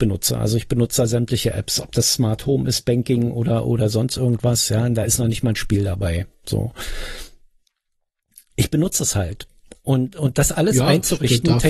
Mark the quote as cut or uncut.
uncut